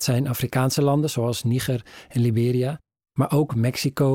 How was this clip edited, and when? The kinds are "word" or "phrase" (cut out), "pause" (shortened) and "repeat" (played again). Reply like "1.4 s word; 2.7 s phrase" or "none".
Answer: none